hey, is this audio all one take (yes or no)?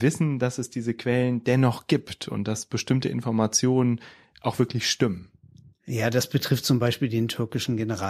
yes